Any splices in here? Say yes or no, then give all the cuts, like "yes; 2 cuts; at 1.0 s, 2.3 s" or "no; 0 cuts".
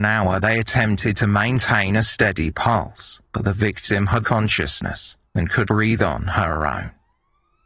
yes; 4 cuts; at 3.3 s, 4.2 s, 5.3 s, 5.7 s